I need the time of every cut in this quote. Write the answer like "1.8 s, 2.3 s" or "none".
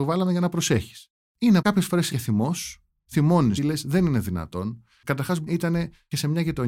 1.6 s, 2.1 s, 3.6 s, 5.5 s